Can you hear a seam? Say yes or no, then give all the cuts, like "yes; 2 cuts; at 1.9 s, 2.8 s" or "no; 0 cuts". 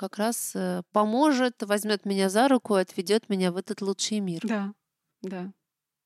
no; 0 cuts